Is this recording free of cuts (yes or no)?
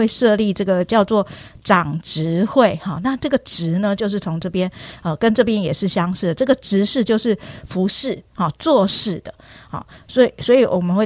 yes